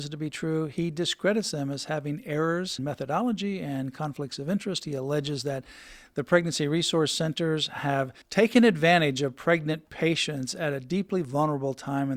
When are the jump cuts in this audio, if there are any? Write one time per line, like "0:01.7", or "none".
0:02.8
0:08.2